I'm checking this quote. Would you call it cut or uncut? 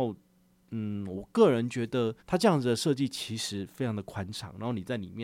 cut